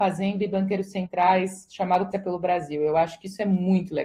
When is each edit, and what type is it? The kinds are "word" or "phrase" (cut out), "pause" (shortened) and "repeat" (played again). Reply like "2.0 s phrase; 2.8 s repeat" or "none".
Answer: 2.1 s word